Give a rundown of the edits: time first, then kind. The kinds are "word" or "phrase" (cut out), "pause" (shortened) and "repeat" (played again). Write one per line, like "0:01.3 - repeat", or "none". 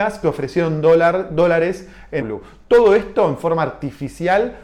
0:02.2 - phrase